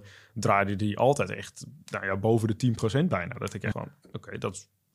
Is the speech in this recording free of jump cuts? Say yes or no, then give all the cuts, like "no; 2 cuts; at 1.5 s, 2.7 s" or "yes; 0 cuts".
no; 1 cut; at 3.7 s